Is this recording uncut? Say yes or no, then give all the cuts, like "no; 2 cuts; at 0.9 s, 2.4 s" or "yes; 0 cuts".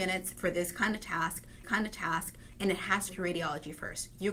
no; 2 cuts; at 1.6 s, 3.1 s